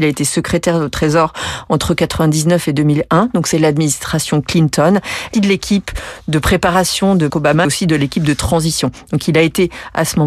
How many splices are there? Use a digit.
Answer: 4